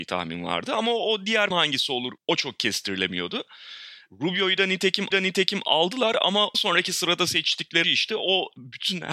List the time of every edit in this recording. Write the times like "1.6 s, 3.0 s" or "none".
1.5 s, 2.2 s, 5.1 s, 6.5 s, 7.8 s